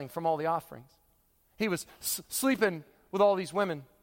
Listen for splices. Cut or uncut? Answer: uncut